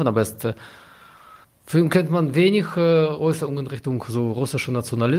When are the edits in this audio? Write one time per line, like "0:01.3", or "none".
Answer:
0:01.4